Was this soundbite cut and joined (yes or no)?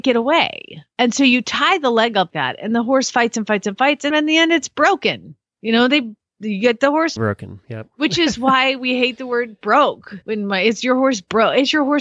yes